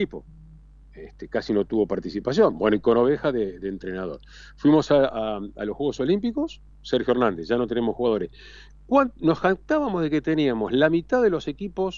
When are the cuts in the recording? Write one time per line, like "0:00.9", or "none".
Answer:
none